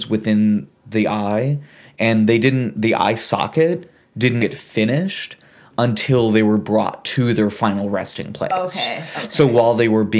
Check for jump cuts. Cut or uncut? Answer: cut